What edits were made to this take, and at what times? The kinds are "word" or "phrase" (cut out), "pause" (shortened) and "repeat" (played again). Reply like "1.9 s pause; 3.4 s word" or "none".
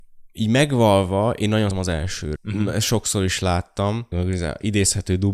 1.7 s word; 2.4 s word; 4.1 s word